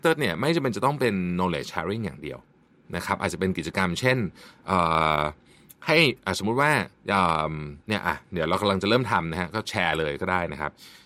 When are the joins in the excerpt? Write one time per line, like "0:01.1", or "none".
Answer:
0:07.0